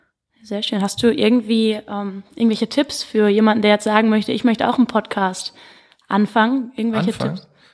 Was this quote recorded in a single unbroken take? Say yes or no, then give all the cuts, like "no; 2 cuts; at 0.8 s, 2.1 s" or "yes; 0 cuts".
yes; 0 cuts